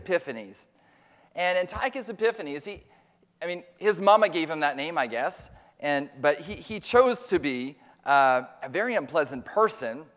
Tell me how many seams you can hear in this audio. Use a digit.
0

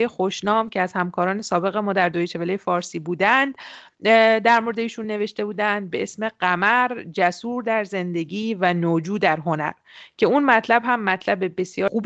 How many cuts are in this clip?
0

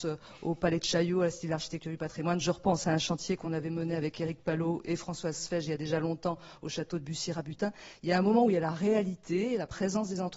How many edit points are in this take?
0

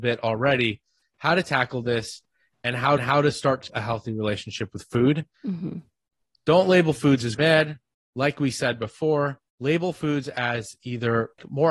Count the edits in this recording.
5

